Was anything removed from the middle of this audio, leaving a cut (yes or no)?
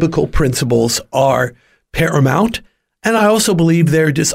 no